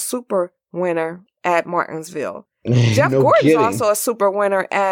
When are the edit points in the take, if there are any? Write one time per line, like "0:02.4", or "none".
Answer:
none